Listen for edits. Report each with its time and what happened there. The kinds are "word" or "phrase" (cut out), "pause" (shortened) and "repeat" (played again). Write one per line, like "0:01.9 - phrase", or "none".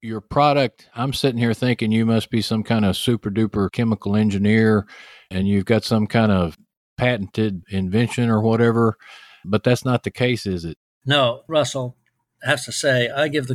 none